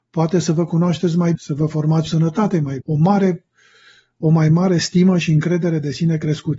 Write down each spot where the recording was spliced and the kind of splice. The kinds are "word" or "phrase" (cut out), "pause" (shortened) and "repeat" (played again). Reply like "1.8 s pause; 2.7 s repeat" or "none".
1.3 s word; 2.1 s phrase; 2.8 s word